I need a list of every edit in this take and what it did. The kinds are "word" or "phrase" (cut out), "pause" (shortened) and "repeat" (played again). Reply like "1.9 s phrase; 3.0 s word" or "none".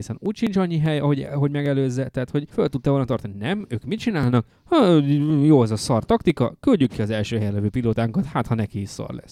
2.5 s pause; 4.5 s pause